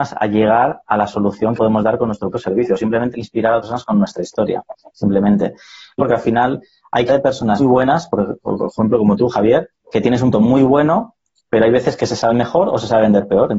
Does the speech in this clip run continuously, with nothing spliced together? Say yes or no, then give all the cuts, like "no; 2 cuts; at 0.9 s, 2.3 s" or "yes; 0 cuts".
no; 9 cuts; at 1.6 s, 2.3 s, 3.1 s, 3.6 s, 6.0 s, 7.1 s, 7.6 s, 10.3 s, 12.3 s